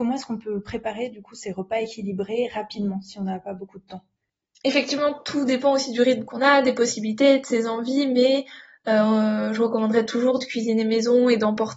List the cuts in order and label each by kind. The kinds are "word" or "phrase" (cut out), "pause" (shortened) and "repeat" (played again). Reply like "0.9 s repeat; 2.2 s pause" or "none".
none